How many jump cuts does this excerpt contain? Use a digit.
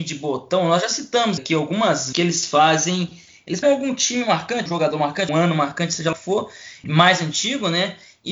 7